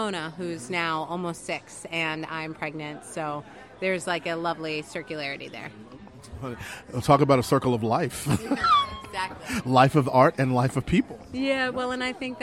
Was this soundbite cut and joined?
no; 0 cuts

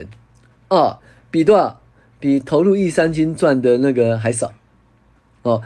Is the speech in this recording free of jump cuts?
yes; 0 cuts

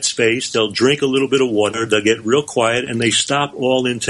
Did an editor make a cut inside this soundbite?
no; 0 cuts

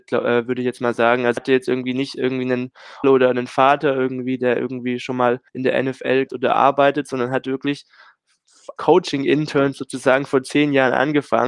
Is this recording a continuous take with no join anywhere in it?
no; 5 cuts; at 1.4 s, 3.0 s, 5.5 s, 6.3 s, 8.8 s

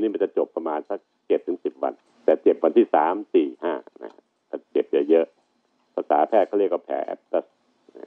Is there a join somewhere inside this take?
yes; 1 cut; at 2.0 s

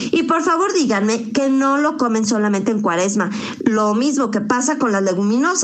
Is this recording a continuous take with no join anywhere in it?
yes; 0 cuts

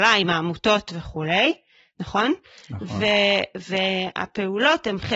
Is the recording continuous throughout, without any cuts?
yes; 0 cuts

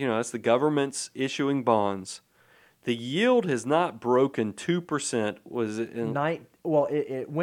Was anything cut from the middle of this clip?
no; 0 cuts

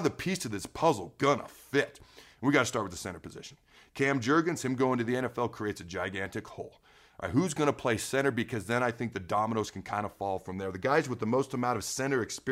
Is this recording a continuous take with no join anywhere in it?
yes; 0 cuts

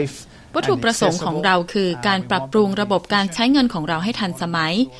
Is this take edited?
no; 0 cuts

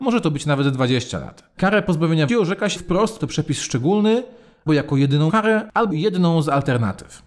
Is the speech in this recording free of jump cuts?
no; 6 cuts; at 2.3 s, 2.8 s, 3.2 s, 4.7 s, 5.3 s, 5.9 s

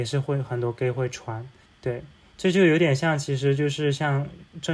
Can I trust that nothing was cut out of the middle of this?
no; 1 cut; at 1.6 s

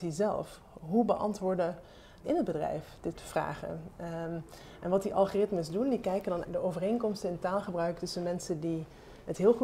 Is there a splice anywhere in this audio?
yes; 3 cuts; at 2.2 s, 3.1 s, 6.4 s

